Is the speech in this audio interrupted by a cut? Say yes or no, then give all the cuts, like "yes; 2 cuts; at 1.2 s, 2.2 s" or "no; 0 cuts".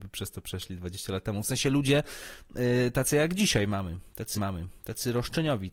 yes; 1 cut; at 4.3 s